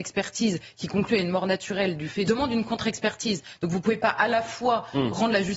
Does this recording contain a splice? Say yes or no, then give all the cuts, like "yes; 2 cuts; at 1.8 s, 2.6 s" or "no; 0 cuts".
yes; 1 cut; at 2.3 s